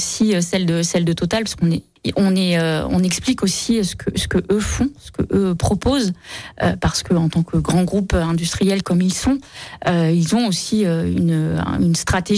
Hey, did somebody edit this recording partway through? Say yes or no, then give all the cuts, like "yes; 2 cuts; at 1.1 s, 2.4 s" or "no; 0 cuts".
yes; 1 cut; at 8.8 s